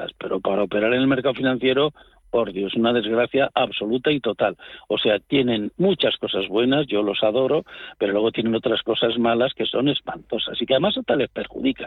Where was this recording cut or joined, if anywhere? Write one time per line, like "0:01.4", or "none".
none

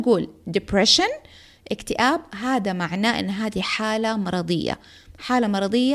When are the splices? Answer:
none

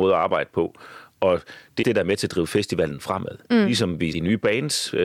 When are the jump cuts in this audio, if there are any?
0:01.8
0:04.1

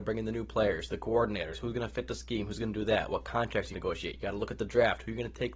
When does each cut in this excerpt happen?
0:03.7

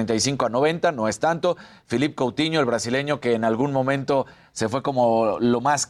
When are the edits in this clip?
none

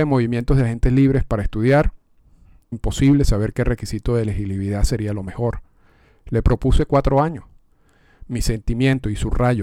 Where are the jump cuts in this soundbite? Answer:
0:02.7

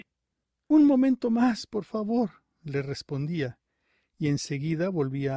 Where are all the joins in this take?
none

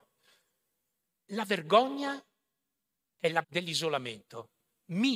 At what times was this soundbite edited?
0:03.4

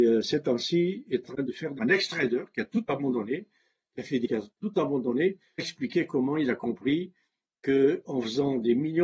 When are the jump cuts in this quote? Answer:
0:01.2
0:01.8
0:04.2
0:05.6

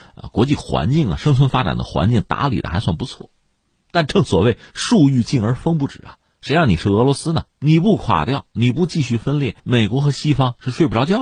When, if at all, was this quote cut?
0:07.5
0:09.6

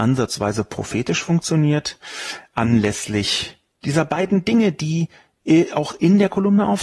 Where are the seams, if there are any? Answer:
none

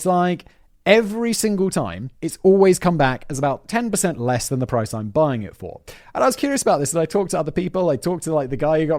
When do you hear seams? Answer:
0:02.1

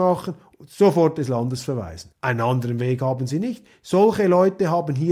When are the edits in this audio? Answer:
0:02.1

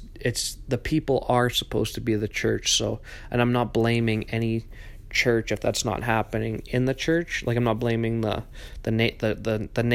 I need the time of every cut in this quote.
none

